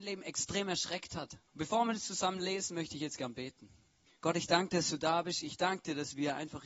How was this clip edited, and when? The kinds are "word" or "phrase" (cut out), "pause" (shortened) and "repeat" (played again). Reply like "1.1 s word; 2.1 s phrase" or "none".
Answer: 1.5 s pause; 4.1 s pause